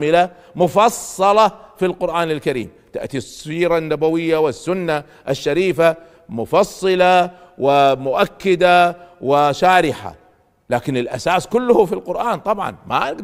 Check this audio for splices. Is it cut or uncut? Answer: uncut